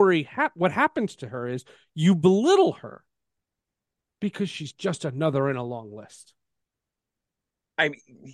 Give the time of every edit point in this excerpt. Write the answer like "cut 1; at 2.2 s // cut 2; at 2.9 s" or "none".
none